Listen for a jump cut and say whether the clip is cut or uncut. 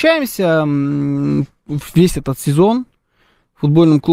uncut